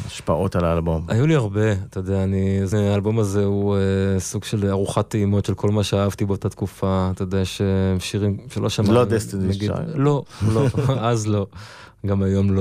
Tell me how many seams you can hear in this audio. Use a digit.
1